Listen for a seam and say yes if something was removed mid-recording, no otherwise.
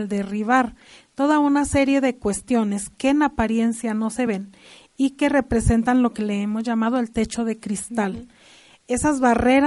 no